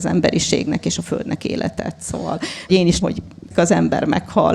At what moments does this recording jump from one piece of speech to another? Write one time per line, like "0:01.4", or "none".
0:01.4
0:02.7
0:03.0
0:03.5